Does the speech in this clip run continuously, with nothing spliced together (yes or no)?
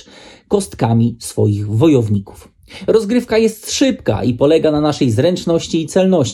yes